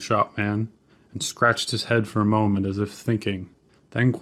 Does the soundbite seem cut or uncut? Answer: uncut